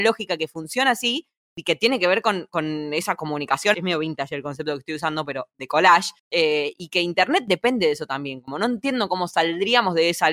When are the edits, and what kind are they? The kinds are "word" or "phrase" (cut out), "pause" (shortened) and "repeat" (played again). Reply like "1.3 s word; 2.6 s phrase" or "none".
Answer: 3.7 s phrase; 6.2 s pause